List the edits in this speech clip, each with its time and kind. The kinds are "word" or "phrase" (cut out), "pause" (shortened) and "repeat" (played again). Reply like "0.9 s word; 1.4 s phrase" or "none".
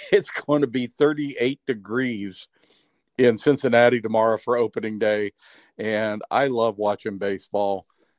none